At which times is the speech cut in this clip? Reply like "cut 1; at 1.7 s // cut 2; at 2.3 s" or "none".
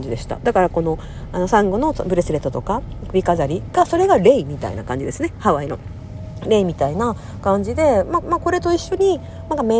cut 1; at 8.2 s